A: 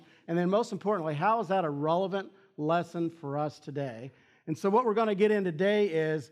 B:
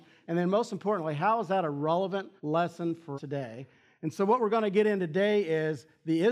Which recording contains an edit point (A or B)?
B